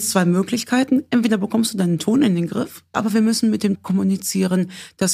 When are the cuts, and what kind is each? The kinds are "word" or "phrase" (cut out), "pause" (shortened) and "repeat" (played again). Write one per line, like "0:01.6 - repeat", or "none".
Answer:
0:02.9 - word
0:03.8 - word